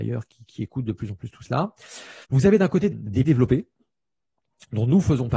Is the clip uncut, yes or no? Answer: no